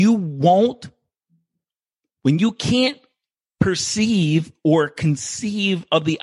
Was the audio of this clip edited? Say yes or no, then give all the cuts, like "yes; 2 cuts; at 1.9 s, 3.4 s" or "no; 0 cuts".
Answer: no; 0 cuts